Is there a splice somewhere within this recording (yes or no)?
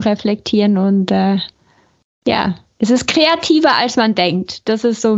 no